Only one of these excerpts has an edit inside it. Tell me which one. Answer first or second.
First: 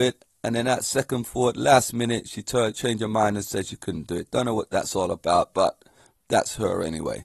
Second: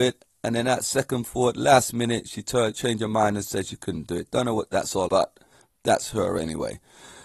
second